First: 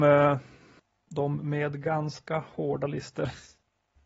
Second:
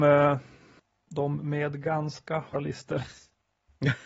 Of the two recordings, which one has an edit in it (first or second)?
second